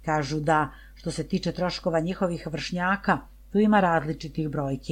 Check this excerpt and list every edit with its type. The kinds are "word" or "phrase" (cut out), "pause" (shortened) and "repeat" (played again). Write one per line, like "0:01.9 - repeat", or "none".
none